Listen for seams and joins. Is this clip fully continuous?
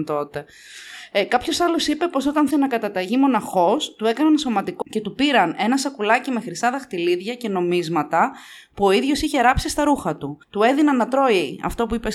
no; 3 cuts; at 2.5 s, 4.8 s, 10.4 s

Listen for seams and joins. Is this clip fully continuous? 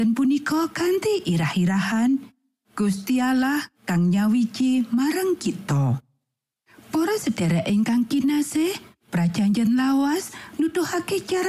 yes; 0 cuts

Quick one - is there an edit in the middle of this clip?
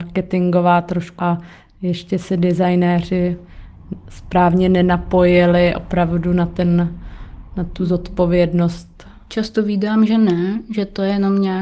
yes; 2 cuts; at 1.2 s, 10.1 s

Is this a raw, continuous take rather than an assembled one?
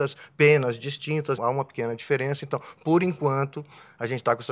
no; 1 cut; at 1.4 s

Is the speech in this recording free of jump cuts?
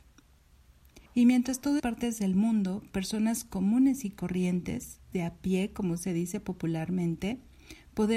no; 3 cuts; at 1.1 s, 1.8 s, 5.1 s

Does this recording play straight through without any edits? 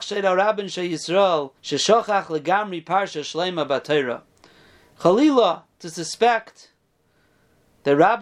no; 1 cut; at 1.6 s

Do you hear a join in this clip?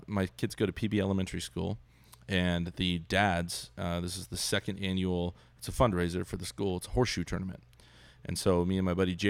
no; 0 cuts

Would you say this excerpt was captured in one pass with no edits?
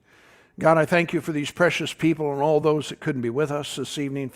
yes; 0 cuts

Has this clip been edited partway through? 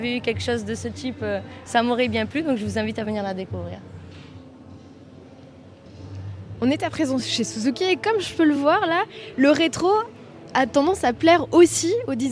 no; 0 cuts

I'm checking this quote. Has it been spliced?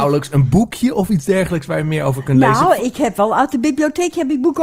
no; 0 cuts

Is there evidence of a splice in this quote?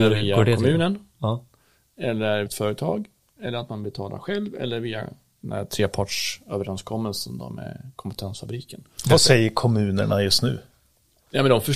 yes; 1 cut; at 2.5 s

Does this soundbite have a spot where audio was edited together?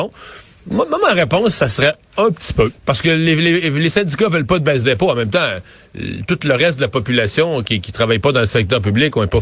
yes; 1 cut; at 2.8 s

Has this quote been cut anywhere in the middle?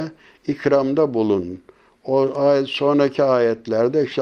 no; 0 cuts

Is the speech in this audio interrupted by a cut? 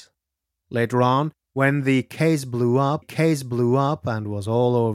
yes; 2 cuts; at 1.4 s, 3.0 s

